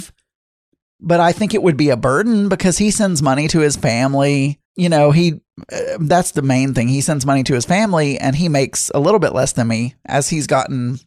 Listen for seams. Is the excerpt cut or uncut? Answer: cut